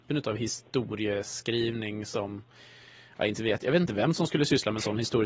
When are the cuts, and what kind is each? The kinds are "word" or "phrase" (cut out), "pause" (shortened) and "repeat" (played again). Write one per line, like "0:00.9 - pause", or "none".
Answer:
none